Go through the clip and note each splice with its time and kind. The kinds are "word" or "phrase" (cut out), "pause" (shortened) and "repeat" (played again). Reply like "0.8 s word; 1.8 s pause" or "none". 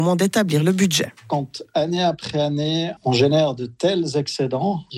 none